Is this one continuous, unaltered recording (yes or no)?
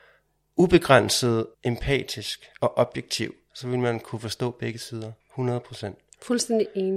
no